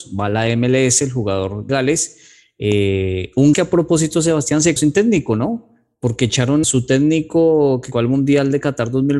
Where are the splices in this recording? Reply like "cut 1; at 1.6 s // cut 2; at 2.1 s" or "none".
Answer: cut 1; at 1.7 s // cut 2; at 3.5 s // cut 3; at 4.8 s // cut 4; at 6.6 s // cut 5; at 7.9 s